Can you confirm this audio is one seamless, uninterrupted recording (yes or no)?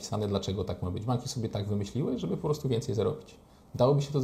yes